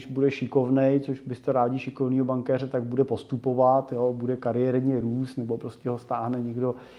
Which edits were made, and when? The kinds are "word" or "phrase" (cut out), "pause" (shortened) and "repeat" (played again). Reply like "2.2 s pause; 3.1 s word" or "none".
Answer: none